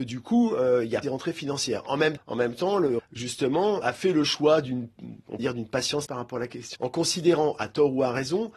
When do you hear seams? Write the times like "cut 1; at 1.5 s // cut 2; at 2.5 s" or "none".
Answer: cut 1; at 1.0 s // cut 2; at 2.2 s // cut 3; at 3.0 s // cut 4; at 3.8 s // cut 5; at 5.4 s // cut 6; at 6.1 s // cut 7; at 6.8 s